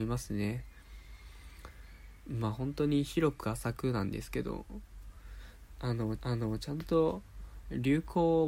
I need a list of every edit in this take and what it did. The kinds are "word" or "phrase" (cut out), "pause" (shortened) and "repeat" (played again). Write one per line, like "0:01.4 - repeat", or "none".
0:06.2 - repeat